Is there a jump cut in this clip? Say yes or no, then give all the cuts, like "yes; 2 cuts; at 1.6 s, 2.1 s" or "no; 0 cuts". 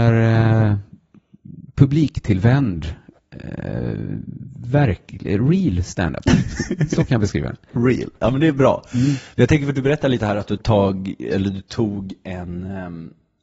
yes; 1 cut; at 10.6 s